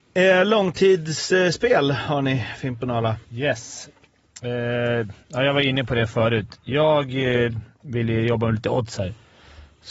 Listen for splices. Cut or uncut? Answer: cut